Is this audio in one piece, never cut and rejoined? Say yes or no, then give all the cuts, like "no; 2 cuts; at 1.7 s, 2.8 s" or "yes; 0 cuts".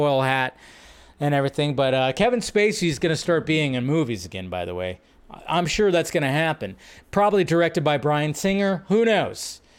yes; 0 cuts